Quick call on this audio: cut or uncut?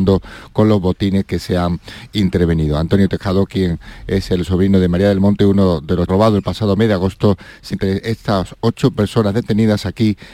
cut